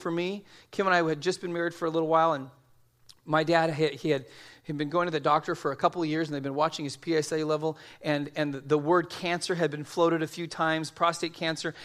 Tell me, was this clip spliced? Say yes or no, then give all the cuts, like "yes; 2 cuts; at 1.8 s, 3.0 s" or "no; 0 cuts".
no; 0 cuts